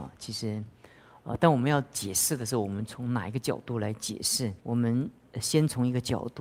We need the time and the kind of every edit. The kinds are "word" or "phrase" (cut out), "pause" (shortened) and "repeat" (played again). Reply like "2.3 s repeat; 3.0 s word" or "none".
4.6 s pause

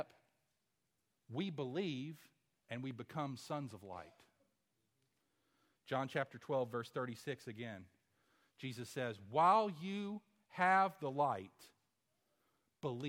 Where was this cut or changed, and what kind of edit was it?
none

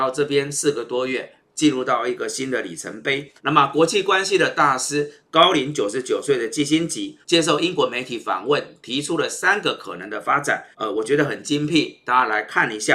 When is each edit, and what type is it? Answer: 3.4 s pause; 7.2 s pause; 10.7 s pause

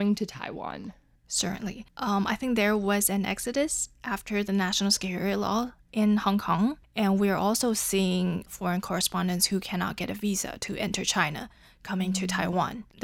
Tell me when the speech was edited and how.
none

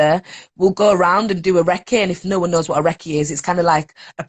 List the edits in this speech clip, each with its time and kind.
none

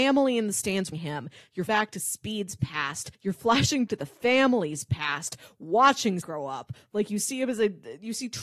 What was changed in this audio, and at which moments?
0.9 s word; 1.7 s word; 3.1 s pause; 3.9 s word; 6.2 s word

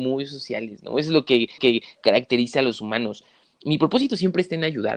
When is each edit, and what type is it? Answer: 1.6 s repeat

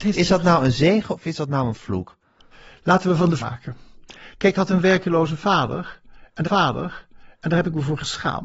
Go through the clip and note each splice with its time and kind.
2.5 s pause; 3.4 s phrase; 4.5 s word; 6.4 s repeat

